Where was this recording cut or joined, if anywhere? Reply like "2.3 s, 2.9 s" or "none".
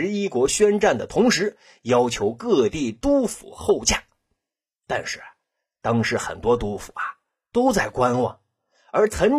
none

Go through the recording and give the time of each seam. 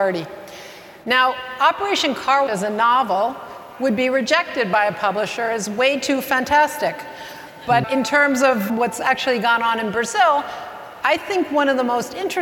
2.5 s, 7.8 s, 8.7 s

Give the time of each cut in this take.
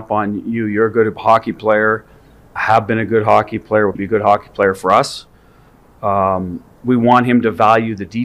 2.6 s, 4.0 s

